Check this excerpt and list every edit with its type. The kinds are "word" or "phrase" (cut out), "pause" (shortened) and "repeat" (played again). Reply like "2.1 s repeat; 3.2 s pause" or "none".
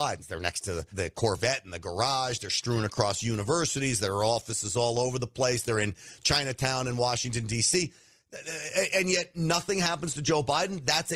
0.9 s word